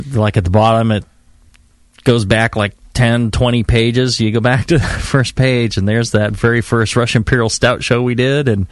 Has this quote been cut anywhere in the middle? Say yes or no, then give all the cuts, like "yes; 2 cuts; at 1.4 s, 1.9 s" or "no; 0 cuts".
no; 0 cuts